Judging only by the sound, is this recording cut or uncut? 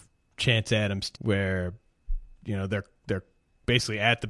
cut